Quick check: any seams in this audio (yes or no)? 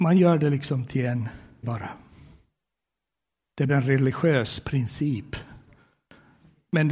yes